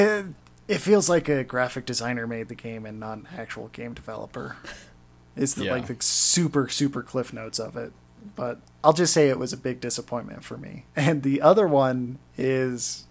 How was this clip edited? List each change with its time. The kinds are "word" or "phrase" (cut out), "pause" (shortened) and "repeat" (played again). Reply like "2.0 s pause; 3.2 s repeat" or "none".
10.9 s pause

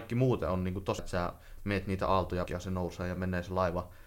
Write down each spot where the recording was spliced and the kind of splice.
1.0 s word; 2.5 s word

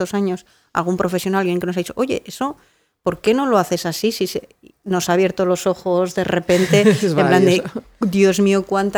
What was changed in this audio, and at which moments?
none

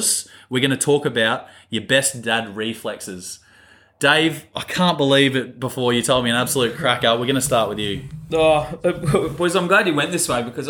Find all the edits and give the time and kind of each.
none

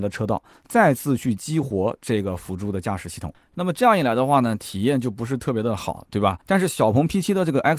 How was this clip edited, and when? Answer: 6.4 s pause

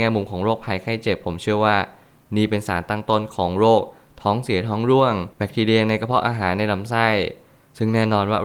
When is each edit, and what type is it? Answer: 5.3 s pause

